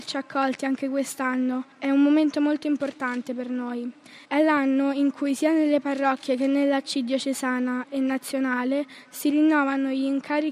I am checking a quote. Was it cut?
yes; 2 cuts; at 1.7 s, 4.3 s

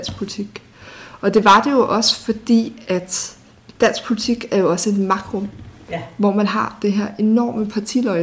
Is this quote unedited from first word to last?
no; 1 cut; at 3.5 s

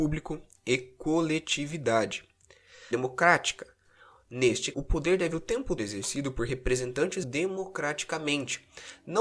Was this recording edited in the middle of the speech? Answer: yes; 5 cuts; at 2.9 s, 4.7 s, 5.3 s, 5.8 s, 7.2 s

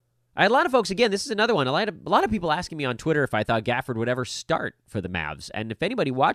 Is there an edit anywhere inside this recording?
no; 0 cuts

